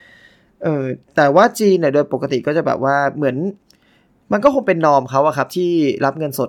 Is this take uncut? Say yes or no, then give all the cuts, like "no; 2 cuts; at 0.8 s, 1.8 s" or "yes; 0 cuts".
yes; 0 cuts